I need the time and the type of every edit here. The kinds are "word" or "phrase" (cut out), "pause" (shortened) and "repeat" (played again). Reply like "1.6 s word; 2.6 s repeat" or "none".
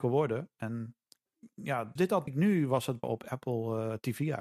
2.0 s word; 2.3 s word; 3.0 s word